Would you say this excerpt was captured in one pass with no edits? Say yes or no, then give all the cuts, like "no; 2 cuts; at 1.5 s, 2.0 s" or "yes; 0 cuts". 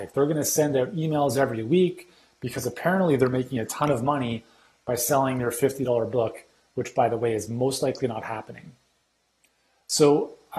yes; 0 cuts